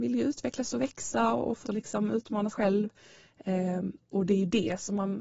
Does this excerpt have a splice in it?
yes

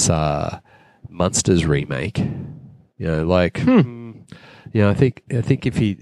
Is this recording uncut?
yes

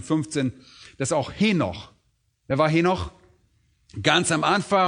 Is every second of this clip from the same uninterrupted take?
yes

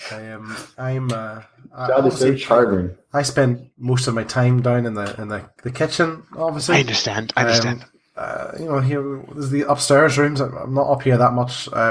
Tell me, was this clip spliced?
no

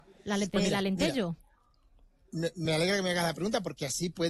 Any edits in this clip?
no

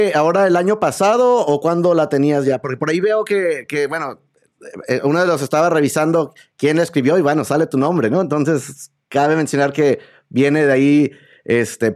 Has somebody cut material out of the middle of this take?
no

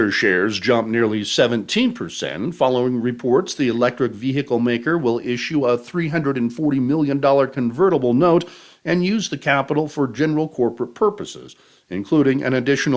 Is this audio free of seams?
yes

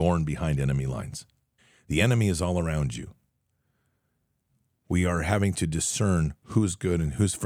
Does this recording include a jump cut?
yes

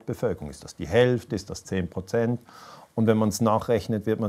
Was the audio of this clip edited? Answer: no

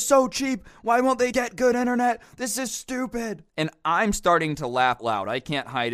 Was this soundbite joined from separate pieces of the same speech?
yes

